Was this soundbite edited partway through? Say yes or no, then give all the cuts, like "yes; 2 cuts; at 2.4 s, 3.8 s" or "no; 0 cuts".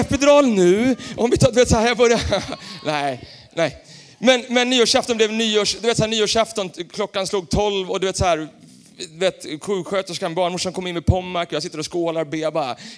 no; 0 cuts